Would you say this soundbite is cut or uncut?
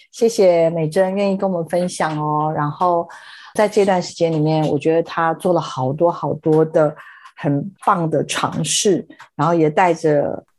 cut